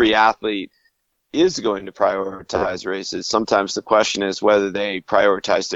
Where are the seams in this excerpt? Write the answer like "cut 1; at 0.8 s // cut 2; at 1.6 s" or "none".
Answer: none